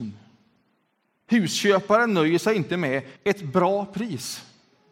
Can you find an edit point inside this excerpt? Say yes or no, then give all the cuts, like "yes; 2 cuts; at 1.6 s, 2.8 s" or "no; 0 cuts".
yes; 1 cut; at 3.2 s